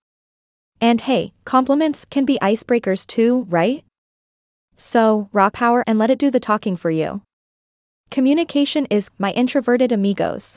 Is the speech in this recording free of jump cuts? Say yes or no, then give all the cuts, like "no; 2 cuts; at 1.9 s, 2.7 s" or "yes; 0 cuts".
no; 3 cuts; at 5.5 s, 5.8 s, 9.1 s